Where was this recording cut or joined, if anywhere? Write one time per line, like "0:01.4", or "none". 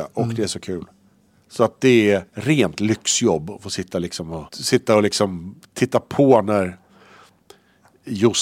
0:02.3
0:04.5

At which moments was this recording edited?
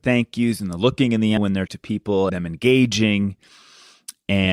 0:01.4
0:01.7
0:02.3

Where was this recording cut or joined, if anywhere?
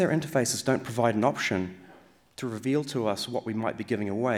none

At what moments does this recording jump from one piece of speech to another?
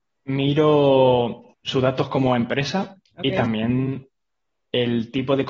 0:01.5
0:03.1

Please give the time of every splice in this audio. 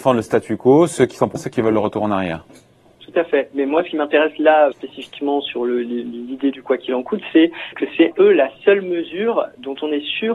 0:01.4
0:04.7
0:07.7
0:08.1

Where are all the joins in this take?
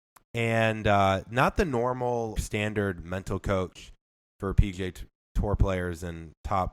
0:02.4

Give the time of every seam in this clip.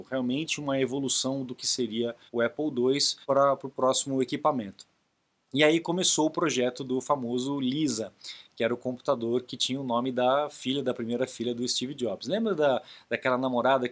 0:02.3
0:03.2

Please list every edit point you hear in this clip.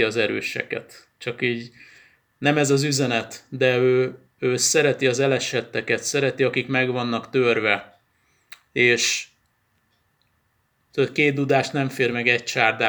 none

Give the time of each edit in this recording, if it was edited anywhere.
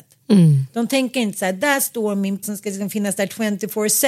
0:02.4

